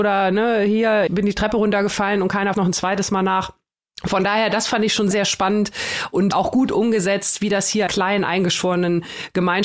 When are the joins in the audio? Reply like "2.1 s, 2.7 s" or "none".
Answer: 1.1 s, 2.5 s, 5.1 s, 6.3 s, 7.9 s